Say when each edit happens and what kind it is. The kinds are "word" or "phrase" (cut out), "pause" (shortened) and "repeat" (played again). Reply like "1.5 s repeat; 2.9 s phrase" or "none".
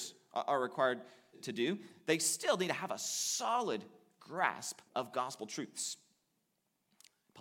1.3 s word; 4.9 s pause